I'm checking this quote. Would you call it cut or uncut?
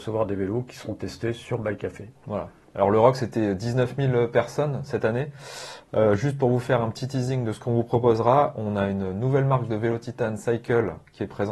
uncut